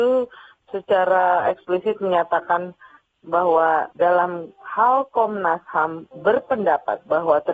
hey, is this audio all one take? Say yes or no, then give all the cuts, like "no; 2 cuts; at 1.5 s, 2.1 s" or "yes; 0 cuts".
yes; 0 cuts